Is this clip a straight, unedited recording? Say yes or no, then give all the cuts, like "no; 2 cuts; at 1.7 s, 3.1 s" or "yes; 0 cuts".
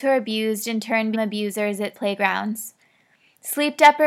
no; 2 cuts; at 1.1 s, 1.9 s